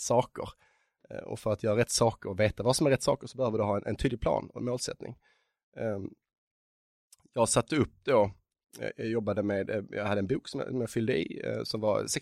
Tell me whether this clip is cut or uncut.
uncut